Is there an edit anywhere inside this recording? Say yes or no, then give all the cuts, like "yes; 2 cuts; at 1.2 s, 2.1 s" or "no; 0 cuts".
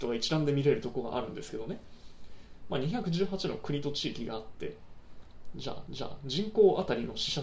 yes; 1 cut; at 5.9 s